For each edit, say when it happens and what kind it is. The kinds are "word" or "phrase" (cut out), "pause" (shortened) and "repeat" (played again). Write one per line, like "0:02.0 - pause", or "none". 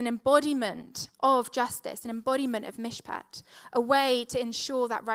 0:01.1 - pause